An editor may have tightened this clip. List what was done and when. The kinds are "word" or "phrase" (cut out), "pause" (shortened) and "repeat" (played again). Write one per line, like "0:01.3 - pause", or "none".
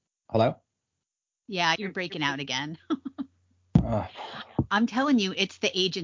0:01.8 - word